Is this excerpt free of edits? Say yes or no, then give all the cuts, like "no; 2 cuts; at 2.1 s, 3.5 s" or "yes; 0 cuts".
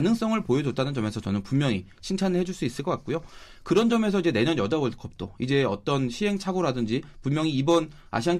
yes; 0 cuts